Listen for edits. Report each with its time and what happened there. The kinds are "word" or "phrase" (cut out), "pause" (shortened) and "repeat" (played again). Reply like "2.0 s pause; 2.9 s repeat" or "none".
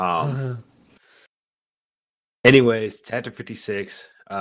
none